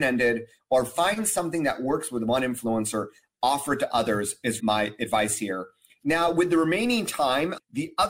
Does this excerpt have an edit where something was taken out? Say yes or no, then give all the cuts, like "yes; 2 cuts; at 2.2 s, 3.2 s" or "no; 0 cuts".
yes; 1 cut; at 4.6 s